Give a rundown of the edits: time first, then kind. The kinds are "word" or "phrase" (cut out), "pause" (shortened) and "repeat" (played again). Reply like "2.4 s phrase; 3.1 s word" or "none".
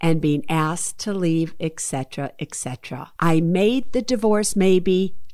3.2 s pause